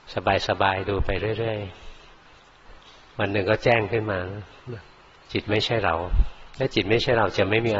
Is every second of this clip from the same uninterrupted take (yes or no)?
yes